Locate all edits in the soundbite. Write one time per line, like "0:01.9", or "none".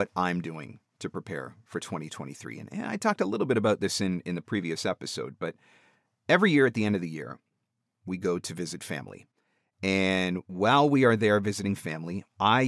none